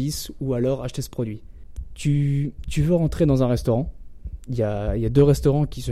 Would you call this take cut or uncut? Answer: uncut